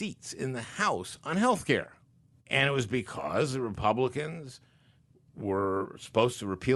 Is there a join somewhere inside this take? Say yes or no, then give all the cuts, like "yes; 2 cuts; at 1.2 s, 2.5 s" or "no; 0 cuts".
yes; 1 cut; at 2.1 s